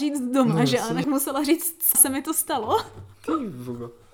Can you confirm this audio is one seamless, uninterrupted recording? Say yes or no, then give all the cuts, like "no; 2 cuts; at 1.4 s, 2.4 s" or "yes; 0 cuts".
no; 2 cuts; at 1.0 s, 1.9 s